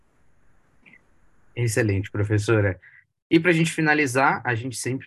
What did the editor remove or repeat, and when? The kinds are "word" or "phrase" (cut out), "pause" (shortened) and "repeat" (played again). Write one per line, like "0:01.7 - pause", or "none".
none